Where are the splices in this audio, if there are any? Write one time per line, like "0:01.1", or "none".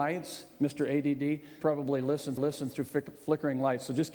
0:01.6
0:02.4